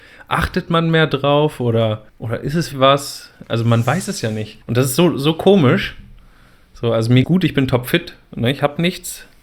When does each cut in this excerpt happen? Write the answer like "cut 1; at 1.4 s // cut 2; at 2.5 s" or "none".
cut 1; at 2.1 s // cut 2; at 2.7 s // cut 3; at 4.6 s // cut 4; at 7.2 s